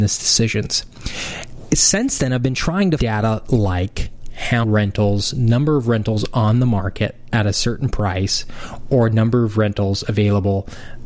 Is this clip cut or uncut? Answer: cut